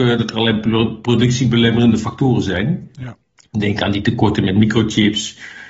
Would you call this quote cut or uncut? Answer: uncut